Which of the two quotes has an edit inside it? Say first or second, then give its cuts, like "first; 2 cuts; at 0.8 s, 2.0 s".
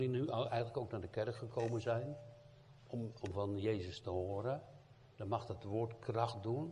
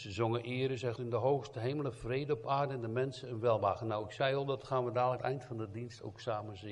second; 2 cuts; at 1.0 s, 5.2 s